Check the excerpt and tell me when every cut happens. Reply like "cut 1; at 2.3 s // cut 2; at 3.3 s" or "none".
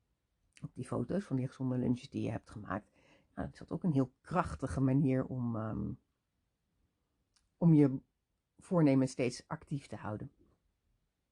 none